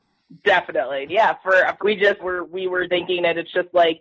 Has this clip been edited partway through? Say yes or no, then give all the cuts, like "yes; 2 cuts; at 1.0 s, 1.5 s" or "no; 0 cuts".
yes; 4 cuts; at 1.1 s, 1.8 s, 2.2 s, 2.9 s